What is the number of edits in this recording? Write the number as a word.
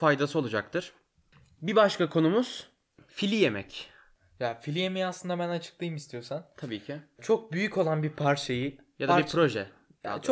zero